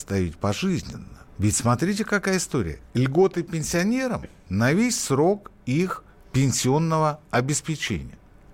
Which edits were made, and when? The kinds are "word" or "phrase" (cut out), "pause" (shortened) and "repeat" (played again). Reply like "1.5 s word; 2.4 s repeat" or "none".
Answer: 1.3 s pause; 6.1 s pause